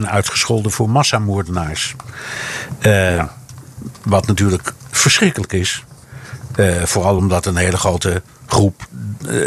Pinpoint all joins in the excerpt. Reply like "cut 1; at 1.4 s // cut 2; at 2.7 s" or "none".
none